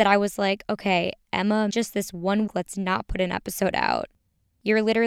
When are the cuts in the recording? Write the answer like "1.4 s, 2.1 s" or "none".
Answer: 1.7 s, 2.5 s

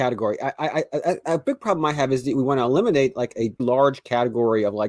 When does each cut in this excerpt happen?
3.6 s

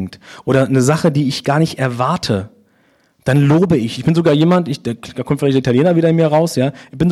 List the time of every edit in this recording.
none

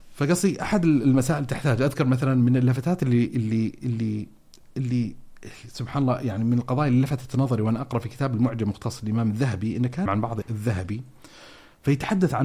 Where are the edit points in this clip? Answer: 10.1 s, 10.4 s

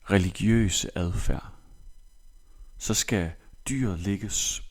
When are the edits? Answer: none

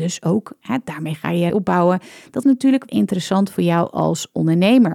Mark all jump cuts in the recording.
1.5 s, 2.4 s, 2.9 s

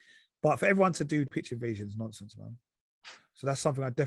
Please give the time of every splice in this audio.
1.3 s

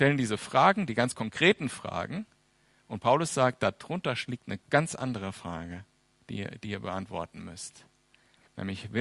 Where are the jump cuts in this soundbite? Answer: none

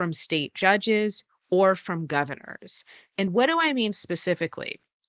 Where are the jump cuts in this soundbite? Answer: 3.3 s

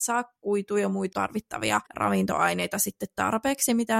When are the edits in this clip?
1.1 s, 1.9 s

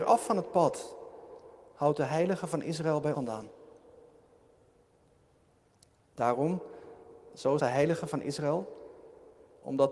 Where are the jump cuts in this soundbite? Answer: 3.1 s, 7.6 s

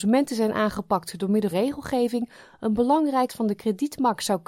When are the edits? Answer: 1.5 s, 3.3 s

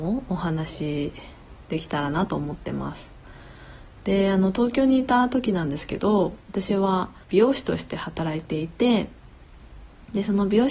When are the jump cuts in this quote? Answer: 7.2 s

